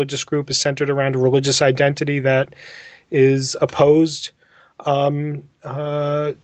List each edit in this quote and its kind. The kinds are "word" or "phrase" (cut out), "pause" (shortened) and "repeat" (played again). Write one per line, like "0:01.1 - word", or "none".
none

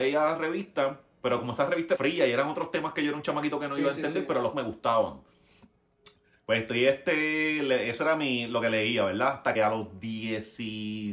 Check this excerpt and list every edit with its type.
0:01.9 - word
0:04.5 - word
0:09.5 - word

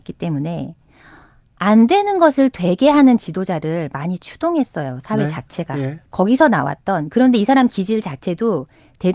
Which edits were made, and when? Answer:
0:06.1 - pause

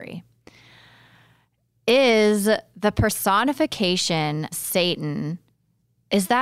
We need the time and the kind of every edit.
0:04.5 - word

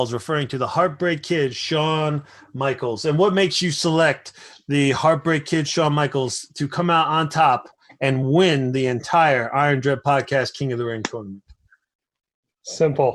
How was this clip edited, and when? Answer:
none

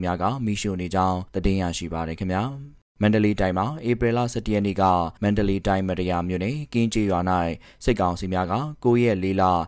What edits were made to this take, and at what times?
0:01.3 - pause
0:02.8 - pause
0:05.2 - pause

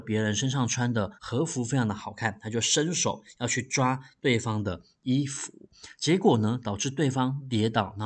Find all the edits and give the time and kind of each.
0:01.1 - pause

